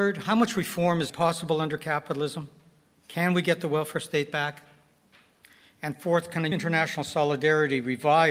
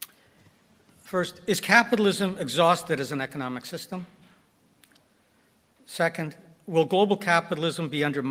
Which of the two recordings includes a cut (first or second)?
first